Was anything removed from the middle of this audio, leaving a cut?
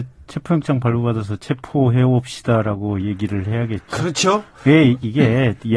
no; 0 cuts

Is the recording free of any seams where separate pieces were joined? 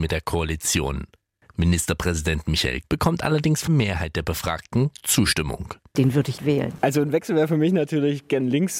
no; 3 cuts; at 2.8 s, 3.7 s, 6.4 s

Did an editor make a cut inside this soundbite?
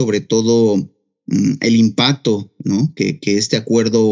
no; 0 cuts

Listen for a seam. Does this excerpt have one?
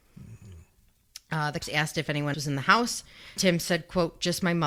yes; 3 cuts; at 1.6 s, 2.3 s, 3.4 s

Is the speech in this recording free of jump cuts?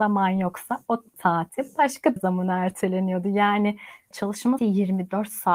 no; 4 cuts; at 1.2 s, 2.2 s, 4.1 s, 4.6 s

